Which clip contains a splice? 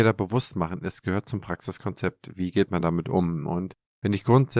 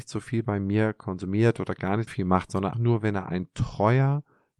second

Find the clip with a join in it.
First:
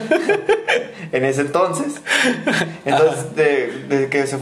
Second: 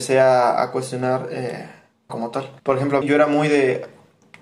second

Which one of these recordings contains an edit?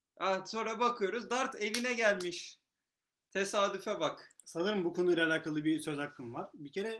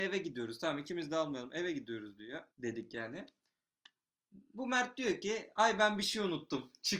second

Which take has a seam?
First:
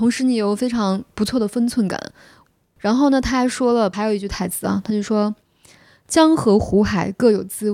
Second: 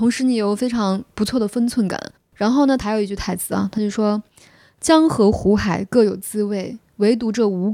second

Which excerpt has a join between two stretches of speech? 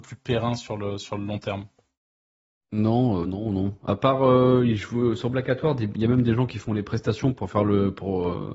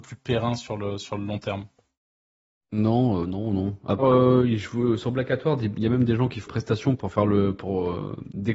second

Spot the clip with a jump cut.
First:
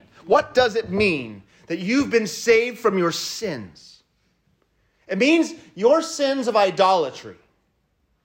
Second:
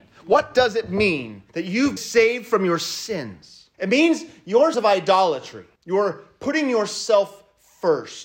second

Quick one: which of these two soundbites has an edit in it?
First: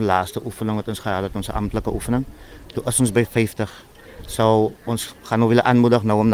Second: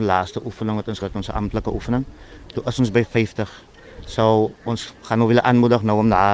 second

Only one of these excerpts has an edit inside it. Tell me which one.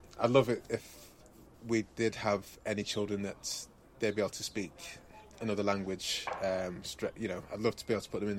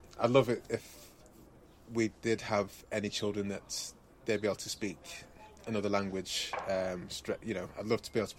first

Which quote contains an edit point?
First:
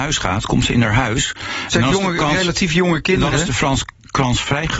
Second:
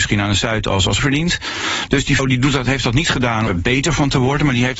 second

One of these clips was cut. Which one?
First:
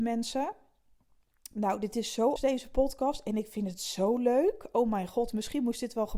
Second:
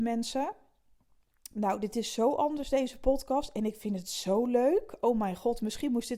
first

